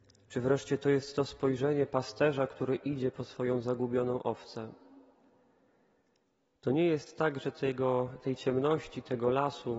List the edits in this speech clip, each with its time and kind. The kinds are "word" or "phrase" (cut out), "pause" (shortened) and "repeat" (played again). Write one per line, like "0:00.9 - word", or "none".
none